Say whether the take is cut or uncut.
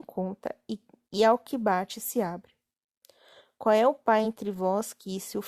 uncut